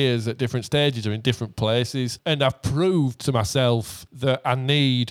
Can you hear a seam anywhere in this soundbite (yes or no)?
no